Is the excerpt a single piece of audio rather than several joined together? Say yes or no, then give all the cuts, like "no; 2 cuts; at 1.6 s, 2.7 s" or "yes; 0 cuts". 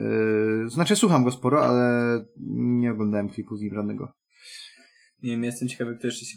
yes; 0 cuts